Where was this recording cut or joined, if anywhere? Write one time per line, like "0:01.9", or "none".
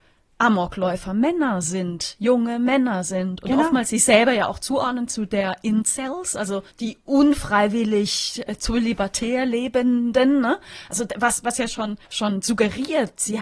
0:06.7
0:12.0